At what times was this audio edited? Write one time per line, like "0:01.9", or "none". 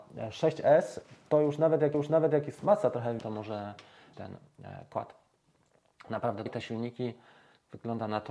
0:01.9
0:03.2
0:04.1
0:06.5